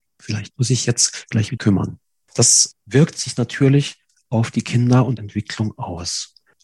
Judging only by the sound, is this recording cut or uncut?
cut